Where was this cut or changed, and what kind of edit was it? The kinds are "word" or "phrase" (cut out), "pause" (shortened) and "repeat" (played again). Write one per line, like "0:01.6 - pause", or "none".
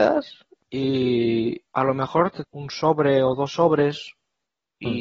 0:01.7 - pause
0:02.4 - word